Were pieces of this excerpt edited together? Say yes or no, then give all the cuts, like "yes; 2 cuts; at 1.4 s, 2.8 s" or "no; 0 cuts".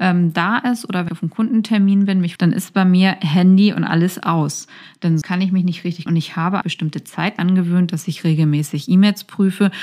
yes; 6 cuts; at 1.1 s, 2.4 s, 5.2 s, 6.1 s, 6.6 s, 7.4 s